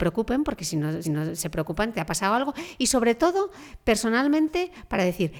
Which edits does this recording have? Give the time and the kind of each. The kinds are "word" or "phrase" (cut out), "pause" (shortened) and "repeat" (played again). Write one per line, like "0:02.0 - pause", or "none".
0:01.0 - repeat